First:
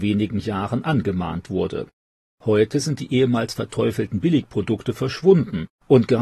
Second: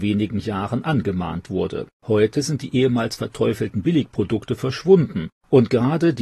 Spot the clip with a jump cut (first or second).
second